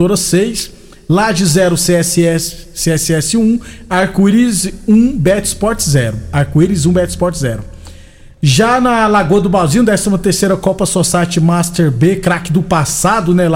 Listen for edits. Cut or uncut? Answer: uncut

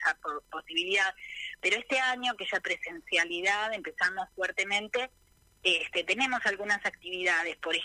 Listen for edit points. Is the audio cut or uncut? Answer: cut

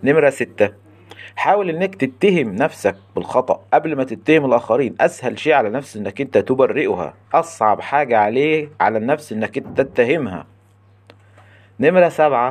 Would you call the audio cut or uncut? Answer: cut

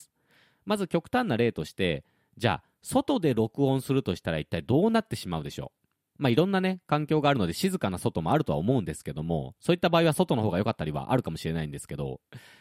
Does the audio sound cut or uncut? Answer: uncut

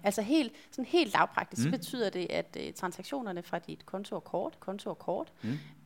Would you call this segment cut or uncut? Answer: cut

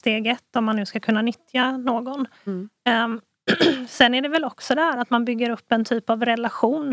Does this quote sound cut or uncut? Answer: uncut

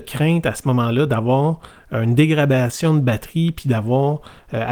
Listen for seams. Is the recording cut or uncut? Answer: uncut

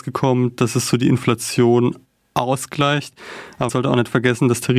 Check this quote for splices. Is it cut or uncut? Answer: cut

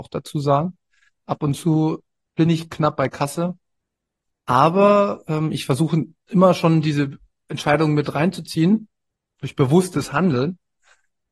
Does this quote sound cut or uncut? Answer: uncut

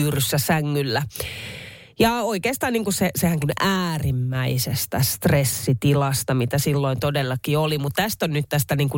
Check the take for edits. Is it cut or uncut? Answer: cut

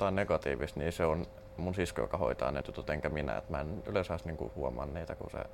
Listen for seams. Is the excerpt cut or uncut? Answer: cut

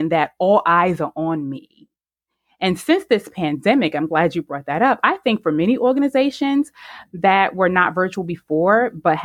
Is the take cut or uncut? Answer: uncut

